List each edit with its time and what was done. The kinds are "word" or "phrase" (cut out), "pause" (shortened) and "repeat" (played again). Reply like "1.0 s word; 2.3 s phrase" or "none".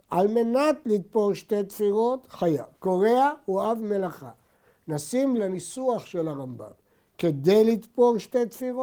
2.7 s pause; 5.4 s word